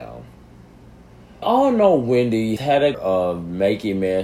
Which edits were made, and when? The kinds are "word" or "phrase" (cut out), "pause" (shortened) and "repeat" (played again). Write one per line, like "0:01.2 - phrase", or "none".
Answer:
0:01.4 - word
0:02.6 - word
0:02.9 - word